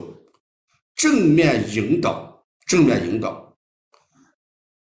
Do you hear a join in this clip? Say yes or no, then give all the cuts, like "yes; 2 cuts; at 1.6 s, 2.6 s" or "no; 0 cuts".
yes; 1 cut; at 2.6 s